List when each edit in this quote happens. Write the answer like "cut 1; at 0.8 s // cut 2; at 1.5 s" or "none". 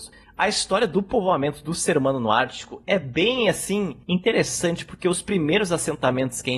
none

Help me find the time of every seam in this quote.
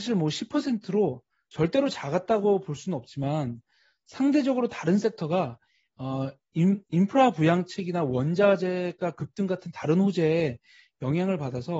none

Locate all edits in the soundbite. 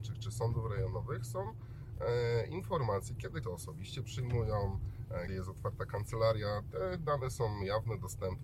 cut 1; at 3.4 s // cut 2; at 5.3 s

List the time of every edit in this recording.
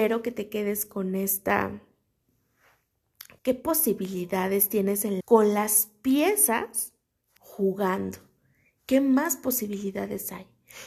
cut 1; at 3.4 s // cut 2; at 5.2 s // cut 3; at 7.4 s

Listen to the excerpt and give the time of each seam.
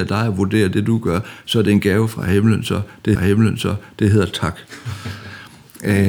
cut 1; at 3.2 s

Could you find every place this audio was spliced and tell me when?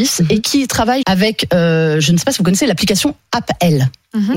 cut 1; at 1.0 s

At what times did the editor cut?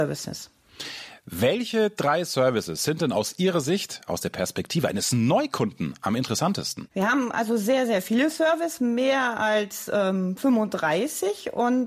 none

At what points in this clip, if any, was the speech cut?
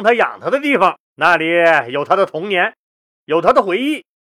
cut 1; at 1.1 s

